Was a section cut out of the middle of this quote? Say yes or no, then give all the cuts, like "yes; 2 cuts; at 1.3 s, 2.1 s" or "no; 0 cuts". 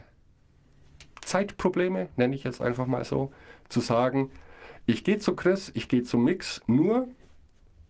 yes; 1 cut; at 1.1 s